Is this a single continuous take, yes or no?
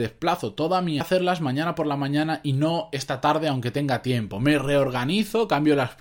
no